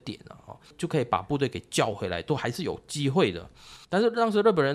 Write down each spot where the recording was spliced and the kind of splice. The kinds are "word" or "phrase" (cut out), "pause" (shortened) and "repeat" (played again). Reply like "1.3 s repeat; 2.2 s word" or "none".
3.8 s pause